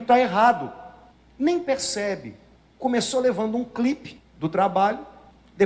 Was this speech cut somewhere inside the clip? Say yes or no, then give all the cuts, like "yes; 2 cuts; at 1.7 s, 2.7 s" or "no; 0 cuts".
no; 0 cuts